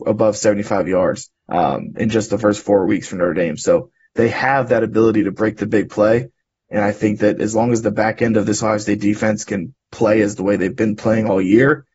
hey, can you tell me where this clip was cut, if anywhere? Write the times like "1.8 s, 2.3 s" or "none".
1.4 s